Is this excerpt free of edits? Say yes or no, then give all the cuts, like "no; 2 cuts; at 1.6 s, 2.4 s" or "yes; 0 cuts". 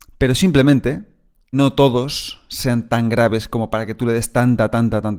no; 1 cut; at 1.5 s